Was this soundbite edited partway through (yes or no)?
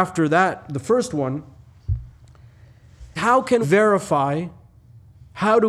yes